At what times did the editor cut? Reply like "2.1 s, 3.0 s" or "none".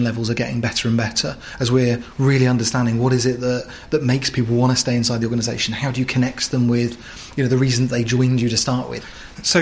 none